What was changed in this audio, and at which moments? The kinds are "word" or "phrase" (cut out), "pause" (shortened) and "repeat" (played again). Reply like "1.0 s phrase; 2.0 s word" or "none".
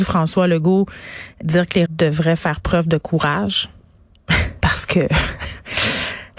1.4 s word; 1.9 s word; 4.6 s word